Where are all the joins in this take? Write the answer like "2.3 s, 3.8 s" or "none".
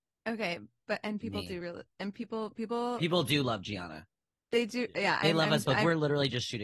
none